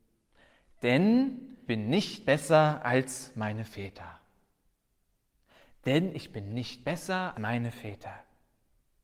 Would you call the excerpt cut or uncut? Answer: cut